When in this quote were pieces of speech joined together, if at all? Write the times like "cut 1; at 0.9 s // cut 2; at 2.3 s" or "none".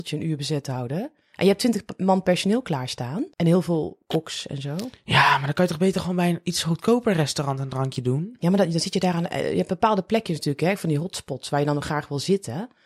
cut 1; at 3.3 s // cut 2; at 5.0 s